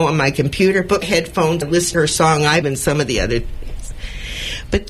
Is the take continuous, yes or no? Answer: no